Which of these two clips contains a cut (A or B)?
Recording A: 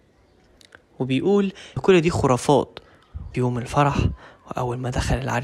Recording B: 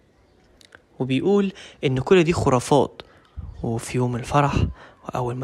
A